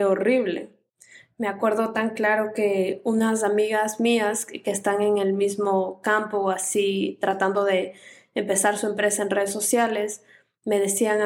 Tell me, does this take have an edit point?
no; 0 cuts

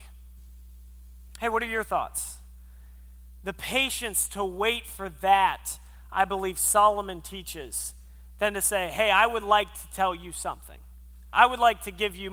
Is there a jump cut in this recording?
no; 0 cuts

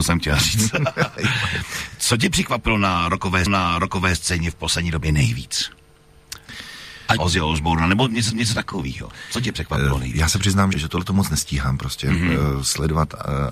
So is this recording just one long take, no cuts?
no; 4 cuts; at 3.5 s, 7.2 s, 8.3 s, 10.7 s

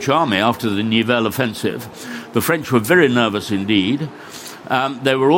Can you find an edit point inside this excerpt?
no; 0 cuts

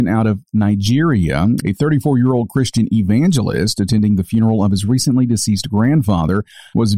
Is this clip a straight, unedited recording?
yes; 0 cuts

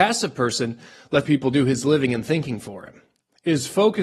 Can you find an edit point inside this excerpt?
yes; 1 cut; at 1.2 s

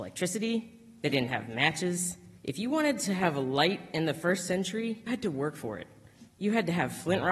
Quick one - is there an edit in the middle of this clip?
yes; 3 cuts; at 2.4 s, 5.1 s, 6.3 s

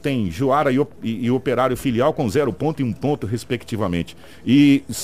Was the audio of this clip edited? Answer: no; 0 cuts

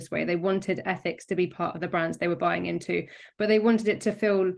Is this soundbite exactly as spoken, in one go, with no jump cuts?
yes; 0 cuts

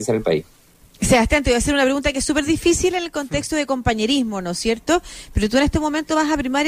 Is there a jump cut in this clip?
no; 0 cuts

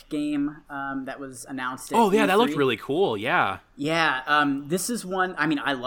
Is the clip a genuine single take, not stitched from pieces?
yes; 0 cuts

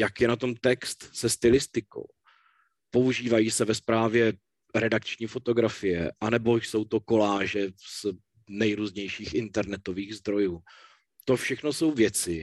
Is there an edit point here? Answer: no; 0 cuts

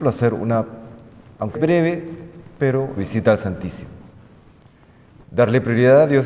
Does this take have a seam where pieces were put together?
yes; 2 cuts; at 1.5 s, 3.0 s

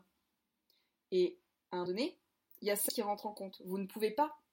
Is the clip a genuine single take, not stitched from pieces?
no; 2 cuts; at 1.9 s, 2.9 s

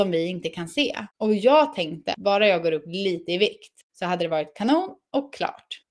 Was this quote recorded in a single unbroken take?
no; 2 cuts; at 1.1 s, 3.8 s

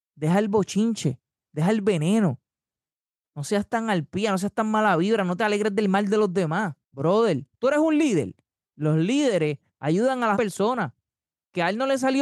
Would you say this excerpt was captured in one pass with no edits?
no; 2 cuts; at 6.8 s, 10.3 s

